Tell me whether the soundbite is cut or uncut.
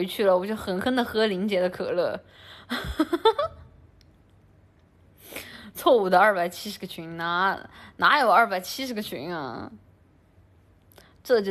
uncut